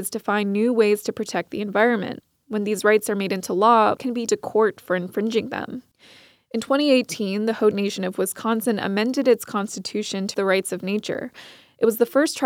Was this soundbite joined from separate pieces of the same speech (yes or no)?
yes